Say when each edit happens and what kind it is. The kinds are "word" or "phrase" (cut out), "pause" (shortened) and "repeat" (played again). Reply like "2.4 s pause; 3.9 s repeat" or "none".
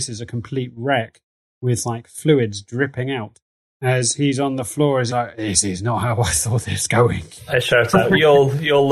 5.1 s word